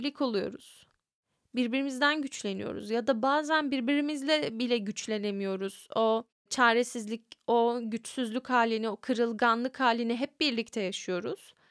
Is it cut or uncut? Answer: uncut